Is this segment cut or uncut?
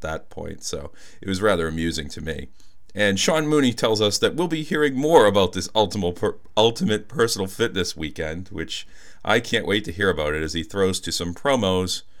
uncut